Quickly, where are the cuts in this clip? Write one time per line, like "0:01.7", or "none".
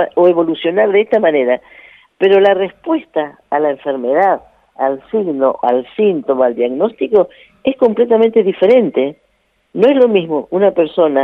none

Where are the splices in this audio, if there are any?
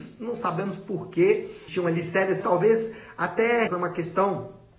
0:01.7
0:02.4
0:03.7

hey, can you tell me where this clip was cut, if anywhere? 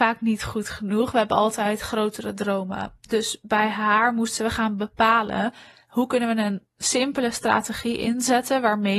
none

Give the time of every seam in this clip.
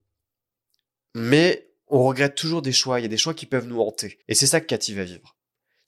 0:04.2

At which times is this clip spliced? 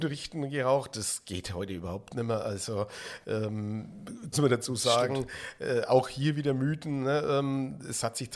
0:04.3

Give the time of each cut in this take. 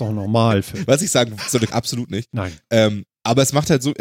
0:01.4
0:01.7

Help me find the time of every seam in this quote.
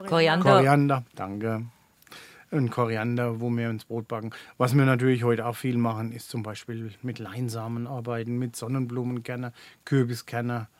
none

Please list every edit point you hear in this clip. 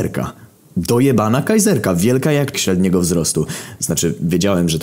0:02.5

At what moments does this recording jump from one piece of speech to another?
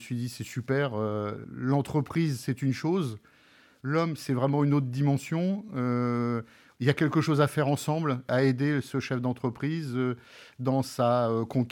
none

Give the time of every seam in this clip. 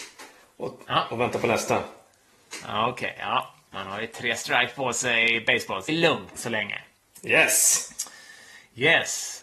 0:05.9
0:06.4

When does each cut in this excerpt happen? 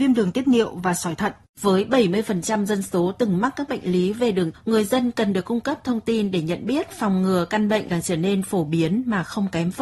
0:04.5
0:07.9

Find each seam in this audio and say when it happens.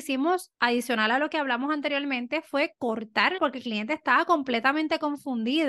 0:03.4

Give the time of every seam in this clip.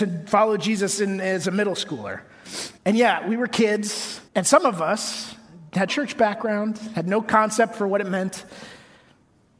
0:02.8
0:04.3
0:05.9

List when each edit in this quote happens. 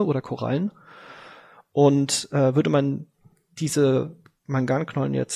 none

